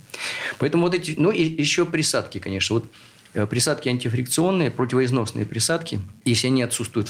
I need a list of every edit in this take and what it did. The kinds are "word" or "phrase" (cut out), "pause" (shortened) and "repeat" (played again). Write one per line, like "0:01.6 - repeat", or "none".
0:06.2 - pause